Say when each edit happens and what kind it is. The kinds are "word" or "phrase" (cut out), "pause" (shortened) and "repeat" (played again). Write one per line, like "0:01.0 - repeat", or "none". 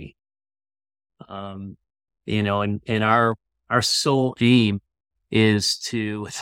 none